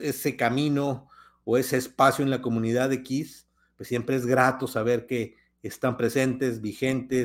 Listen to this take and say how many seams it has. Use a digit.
0